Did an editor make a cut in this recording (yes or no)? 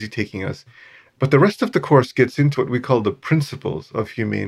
yes